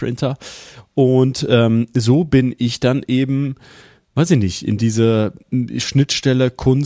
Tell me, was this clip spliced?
no; 0 cuts

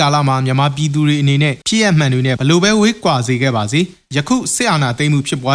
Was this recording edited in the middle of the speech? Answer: yes; 1 cut; at 1.6 s

